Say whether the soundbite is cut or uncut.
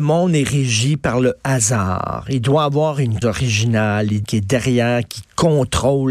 cut